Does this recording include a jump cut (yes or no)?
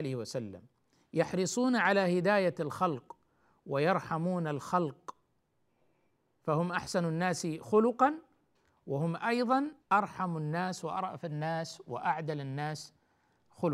yes